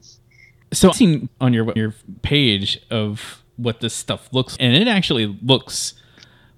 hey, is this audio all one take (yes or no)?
no